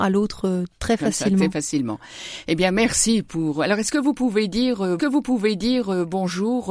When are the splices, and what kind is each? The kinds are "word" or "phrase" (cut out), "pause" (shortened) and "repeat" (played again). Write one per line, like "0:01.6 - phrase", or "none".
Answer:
0:05.0 - repeat